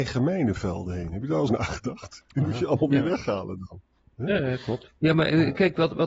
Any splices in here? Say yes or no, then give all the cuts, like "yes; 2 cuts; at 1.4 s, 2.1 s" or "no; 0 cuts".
yes; 2 cuts; at 1.5 s, 5.0 s